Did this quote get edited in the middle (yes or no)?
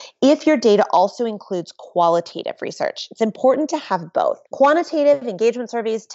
yes